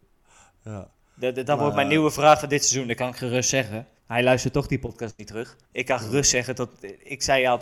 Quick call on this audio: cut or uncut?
cut